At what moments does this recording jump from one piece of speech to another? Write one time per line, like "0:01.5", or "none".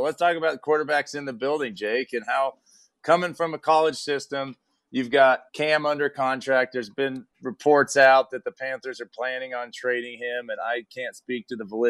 0:05.5